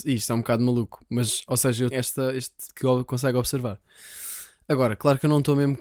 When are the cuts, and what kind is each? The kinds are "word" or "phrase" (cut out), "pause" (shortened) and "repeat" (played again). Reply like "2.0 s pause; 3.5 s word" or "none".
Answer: 1.9 s word; 2.7 s word